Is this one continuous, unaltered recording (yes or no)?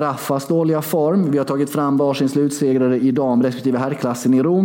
yes